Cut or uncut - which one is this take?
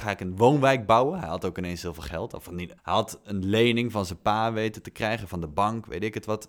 cut